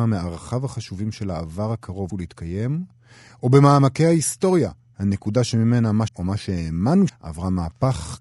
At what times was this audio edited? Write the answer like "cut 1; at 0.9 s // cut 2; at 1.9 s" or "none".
cut 1; at 2.1 s // cut 2; at 6.1 s // cut 3; at 7.1 s